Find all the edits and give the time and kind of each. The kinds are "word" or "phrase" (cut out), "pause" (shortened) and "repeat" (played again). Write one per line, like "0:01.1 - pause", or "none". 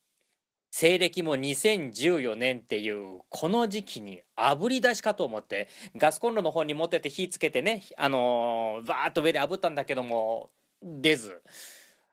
none